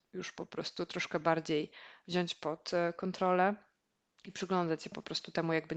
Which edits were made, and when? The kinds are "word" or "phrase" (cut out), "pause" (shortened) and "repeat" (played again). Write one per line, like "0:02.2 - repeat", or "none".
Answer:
none